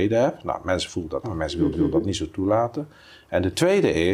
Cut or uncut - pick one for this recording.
cut